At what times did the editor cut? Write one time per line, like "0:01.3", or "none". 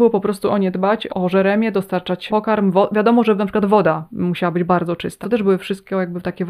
0:01.1
0:02.3
0:05.2